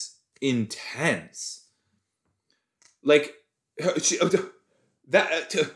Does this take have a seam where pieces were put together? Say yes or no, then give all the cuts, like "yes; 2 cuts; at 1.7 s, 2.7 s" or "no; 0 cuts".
no; 0 cuts